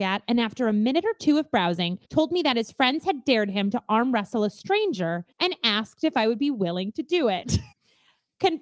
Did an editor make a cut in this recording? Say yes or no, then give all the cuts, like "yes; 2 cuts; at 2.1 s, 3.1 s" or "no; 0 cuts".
yes; 3 cuts; at 2.0 s, 5.3 s, 7.7 s